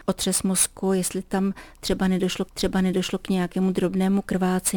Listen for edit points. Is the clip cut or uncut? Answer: cut